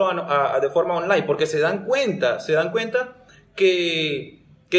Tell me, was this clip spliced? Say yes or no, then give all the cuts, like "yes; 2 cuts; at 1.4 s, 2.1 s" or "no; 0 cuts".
no; 0 cuts